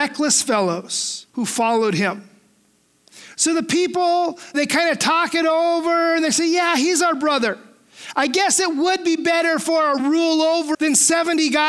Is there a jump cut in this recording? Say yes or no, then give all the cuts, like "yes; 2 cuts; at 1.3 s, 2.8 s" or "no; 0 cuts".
yes; 4 cuts; at 1.3 s, 4.5 s, 10.0 s, 10.7 s